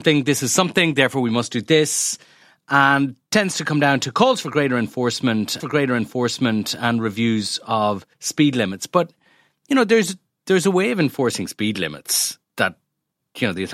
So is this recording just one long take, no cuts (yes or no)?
no